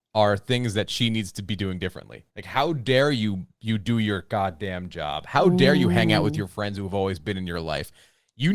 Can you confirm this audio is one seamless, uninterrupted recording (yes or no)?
no